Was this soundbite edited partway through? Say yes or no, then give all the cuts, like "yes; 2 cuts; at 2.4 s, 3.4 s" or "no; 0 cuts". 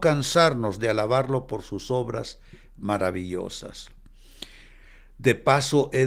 no; 0 cuts